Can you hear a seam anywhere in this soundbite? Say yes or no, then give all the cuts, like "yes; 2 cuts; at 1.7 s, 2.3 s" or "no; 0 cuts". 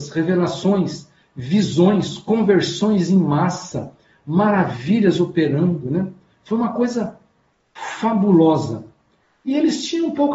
no; 0 cuts